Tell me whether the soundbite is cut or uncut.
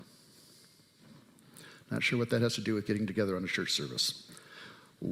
uncut